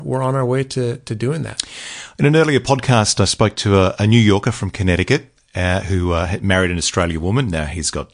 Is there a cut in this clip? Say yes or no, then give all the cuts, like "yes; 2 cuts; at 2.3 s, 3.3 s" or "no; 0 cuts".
no; 0 cuts